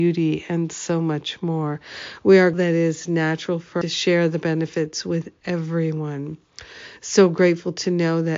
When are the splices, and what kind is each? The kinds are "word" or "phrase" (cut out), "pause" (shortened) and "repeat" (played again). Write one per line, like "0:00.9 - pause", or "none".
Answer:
0:02.5 - word
0:03.8 - phrase